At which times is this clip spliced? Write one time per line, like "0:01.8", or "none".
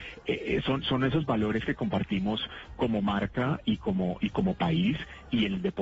0:04.3